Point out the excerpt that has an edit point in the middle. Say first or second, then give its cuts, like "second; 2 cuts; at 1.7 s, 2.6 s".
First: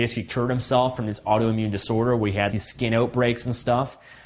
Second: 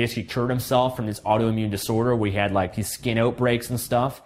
first; 1 cut; at 2.5 s